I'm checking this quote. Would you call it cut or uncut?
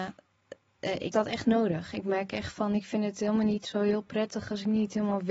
cut